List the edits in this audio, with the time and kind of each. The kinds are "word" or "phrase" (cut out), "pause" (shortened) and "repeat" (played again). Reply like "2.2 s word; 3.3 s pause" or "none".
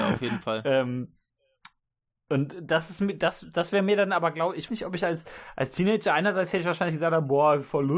2.3 s word; 4.7 s word